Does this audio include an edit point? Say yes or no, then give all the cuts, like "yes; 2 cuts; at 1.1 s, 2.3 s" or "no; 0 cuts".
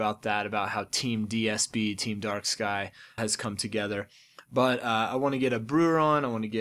yes; 1 cut; at 3.2 s